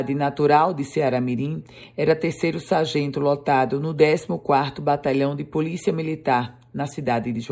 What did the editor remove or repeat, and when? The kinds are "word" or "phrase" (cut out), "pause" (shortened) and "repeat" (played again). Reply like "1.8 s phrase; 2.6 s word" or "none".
none